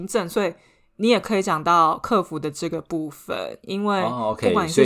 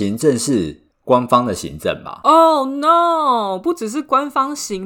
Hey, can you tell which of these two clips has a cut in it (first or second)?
second